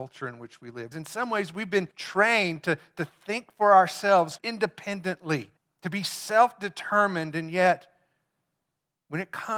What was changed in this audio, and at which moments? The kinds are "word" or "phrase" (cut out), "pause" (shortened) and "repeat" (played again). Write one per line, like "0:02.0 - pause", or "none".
0:00.9 - word
0:01.9 - pause
0:04.4 - phrase
0:05.6 - pause